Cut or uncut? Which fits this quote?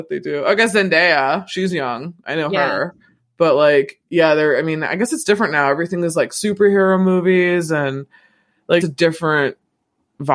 cut